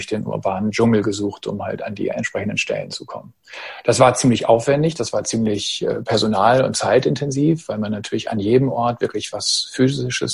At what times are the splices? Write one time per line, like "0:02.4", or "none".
none